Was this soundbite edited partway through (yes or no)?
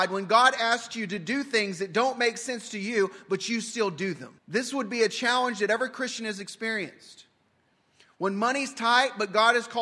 yes